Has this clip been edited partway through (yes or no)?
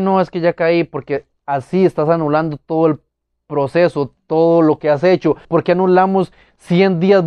yes